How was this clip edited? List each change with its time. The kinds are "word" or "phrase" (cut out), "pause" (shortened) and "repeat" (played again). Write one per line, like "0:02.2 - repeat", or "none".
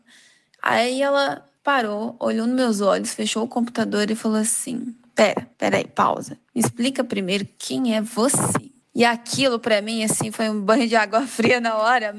0:01.6 - pause
0:05.5 - pause
0:06.5 - pause
0:08.8 - pause